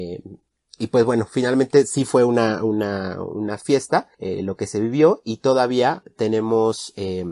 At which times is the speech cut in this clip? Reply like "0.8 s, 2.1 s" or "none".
4.1 s